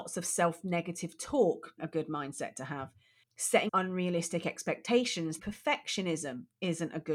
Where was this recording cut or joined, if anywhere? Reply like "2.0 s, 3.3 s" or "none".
1.8 s, 3.7 s, 5.4 s